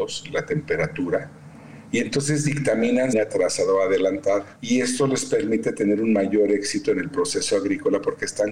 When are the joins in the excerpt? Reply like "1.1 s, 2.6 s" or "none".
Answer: 3.1 s, 4.6 s